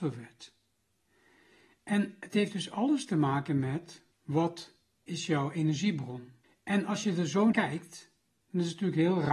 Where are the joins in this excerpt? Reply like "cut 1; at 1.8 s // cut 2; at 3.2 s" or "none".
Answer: cut 1; at 4.1 s // cut 2; at 6.4 s // cut 3; at 7.5 s